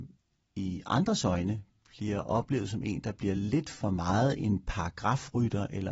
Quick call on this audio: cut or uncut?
uncut